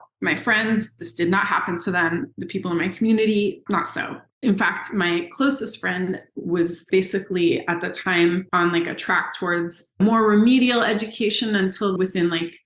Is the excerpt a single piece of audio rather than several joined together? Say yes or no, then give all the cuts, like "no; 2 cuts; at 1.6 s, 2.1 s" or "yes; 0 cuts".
yes; 0 cuts